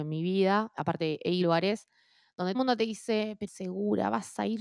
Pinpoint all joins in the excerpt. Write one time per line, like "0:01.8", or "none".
0:01.4
0:02.5
0:03.5